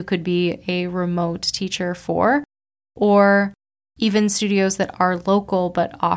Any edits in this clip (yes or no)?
no